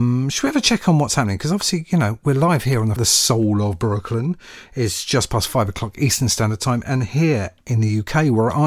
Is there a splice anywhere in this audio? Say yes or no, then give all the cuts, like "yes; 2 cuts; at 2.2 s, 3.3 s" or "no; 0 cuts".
yes; 1 cut; at 3.0 s